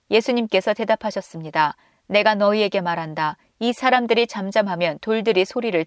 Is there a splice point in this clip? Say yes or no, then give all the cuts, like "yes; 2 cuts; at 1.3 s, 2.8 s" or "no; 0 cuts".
no; 0 cuts